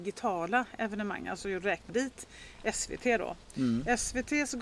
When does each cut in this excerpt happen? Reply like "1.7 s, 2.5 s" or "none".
1.9 s